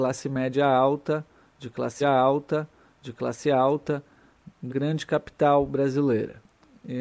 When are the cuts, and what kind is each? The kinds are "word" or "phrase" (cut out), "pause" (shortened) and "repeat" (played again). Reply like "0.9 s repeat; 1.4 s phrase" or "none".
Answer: 2.0 s repeat; 4.7 s word